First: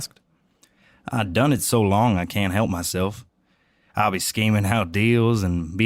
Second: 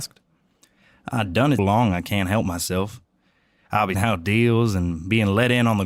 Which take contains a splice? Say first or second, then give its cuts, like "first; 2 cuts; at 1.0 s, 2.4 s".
second; 2 cuts; at 1.6 s, 3.9 s